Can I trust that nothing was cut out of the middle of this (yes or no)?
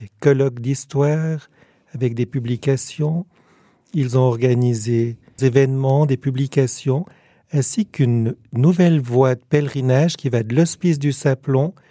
no